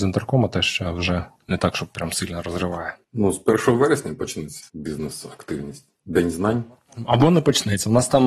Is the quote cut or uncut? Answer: cut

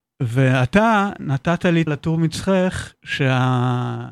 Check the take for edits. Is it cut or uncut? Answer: cut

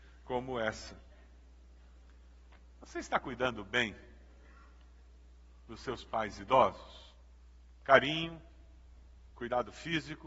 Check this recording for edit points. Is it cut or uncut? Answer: uncut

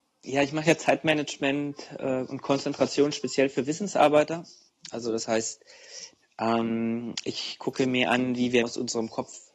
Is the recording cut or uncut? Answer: cut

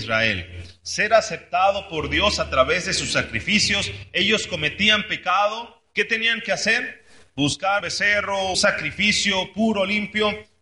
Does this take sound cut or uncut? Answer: cut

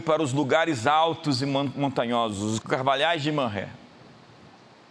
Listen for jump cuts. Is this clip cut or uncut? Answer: cut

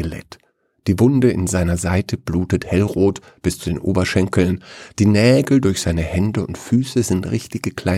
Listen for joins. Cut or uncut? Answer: uncut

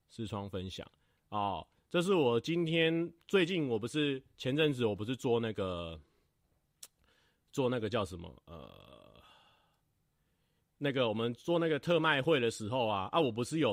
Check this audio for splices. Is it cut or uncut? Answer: uncut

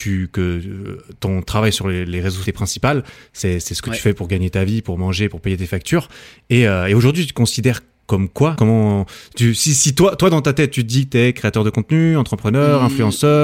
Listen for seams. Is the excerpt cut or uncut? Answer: cut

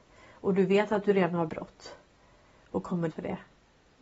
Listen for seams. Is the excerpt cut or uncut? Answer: cut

